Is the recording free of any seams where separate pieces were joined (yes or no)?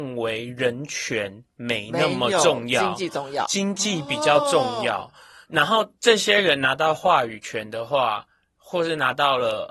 no